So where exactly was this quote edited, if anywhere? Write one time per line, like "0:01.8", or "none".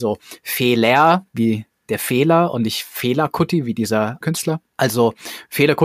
0:04.2